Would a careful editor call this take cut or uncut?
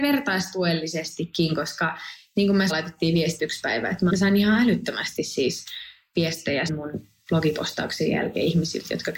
cut